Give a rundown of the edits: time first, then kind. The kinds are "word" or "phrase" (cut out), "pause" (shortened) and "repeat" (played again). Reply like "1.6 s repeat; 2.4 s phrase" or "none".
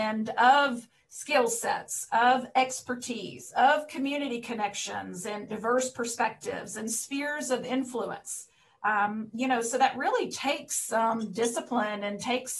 5.5 s word